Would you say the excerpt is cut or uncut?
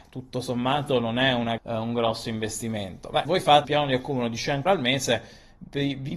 cut